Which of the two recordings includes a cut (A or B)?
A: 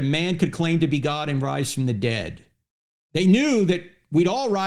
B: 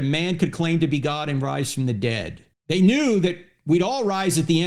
B